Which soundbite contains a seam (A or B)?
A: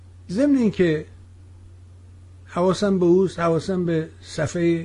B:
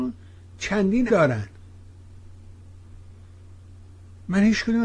B